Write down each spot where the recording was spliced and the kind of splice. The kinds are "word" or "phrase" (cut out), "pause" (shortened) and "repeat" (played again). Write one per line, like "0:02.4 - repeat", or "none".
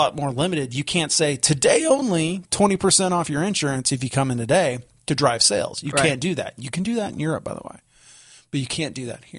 none